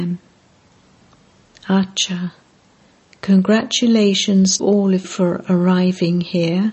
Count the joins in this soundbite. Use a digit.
2